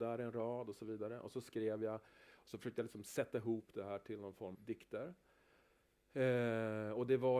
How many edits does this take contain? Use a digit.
1